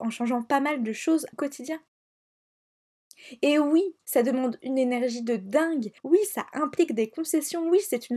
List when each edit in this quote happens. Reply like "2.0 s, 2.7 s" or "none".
1.3 s, 6.0 s